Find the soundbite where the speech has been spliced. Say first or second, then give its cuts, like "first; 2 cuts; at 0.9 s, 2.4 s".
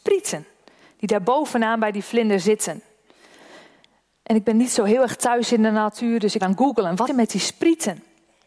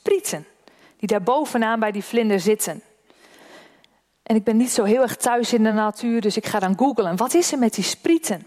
first; 2 cuts; at 6.4 s, 7.1 s